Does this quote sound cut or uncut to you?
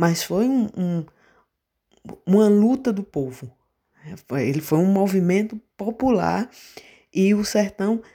uncut